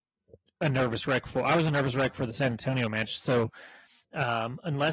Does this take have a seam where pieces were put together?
no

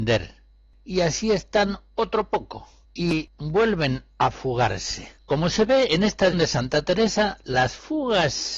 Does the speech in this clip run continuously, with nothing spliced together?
no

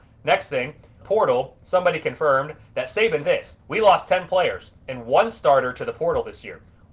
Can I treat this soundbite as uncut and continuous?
no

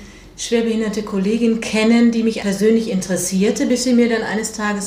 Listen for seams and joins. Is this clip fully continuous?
no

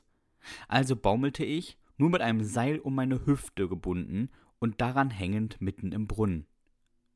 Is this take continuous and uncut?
yes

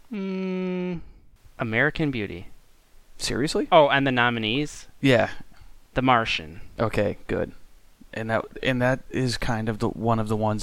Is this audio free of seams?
yes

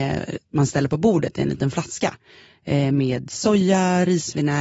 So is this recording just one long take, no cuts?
yes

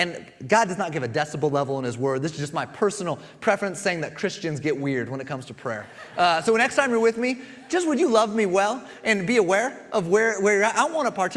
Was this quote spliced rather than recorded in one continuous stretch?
no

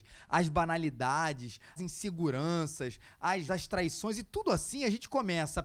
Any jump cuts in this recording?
yes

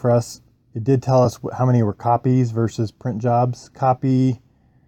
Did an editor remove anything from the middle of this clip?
no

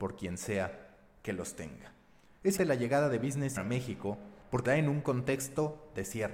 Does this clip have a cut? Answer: yes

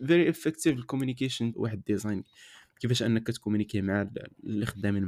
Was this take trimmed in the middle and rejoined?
yes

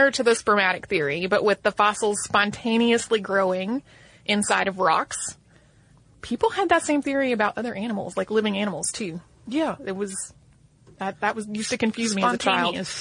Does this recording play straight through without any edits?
yes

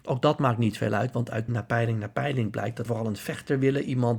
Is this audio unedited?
no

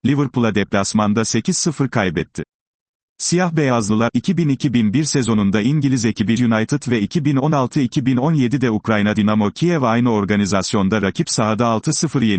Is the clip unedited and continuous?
no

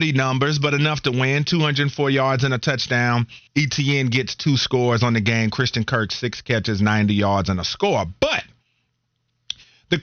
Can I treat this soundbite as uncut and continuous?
no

